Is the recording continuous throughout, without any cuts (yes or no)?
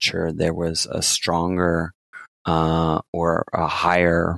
no